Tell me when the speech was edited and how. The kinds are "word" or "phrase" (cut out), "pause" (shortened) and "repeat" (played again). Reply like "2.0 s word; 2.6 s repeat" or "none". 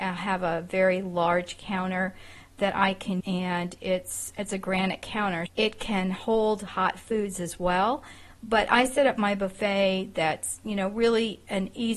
3.2 s word; 4.3 s word; 5.5 s word